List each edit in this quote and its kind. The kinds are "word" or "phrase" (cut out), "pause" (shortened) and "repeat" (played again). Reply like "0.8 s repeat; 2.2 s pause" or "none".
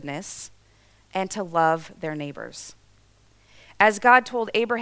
none